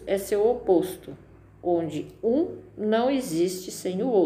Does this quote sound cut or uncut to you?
uncut